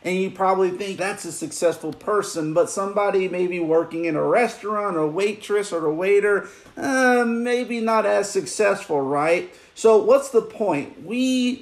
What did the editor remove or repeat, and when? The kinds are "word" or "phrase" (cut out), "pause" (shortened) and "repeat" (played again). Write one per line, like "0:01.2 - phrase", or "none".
0:01.0 - word